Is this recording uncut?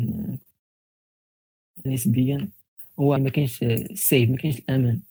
no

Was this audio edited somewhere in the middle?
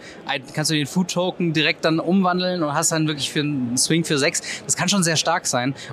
no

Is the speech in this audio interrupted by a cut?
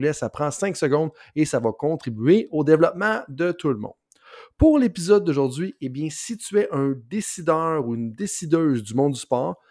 no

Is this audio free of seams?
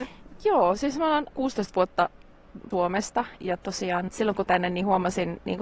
no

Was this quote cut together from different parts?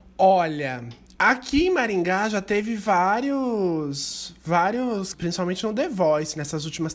yes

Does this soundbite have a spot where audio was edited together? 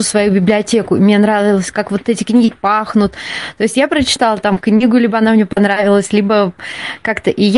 no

